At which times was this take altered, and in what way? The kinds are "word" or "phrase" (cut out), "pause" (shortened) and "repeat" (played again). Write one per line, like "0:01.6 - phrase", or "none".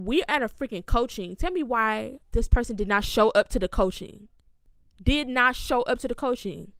0:02.2 - pause